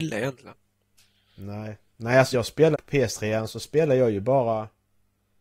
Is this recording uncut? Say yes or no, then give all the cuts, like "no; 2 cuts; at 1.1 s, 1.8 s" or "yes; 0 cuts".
no; 2 cuts; at 2.3 s, 2.7 s